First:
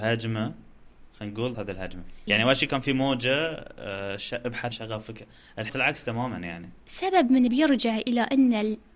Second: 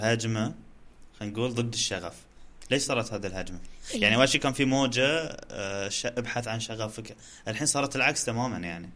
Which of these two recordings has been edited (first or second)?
first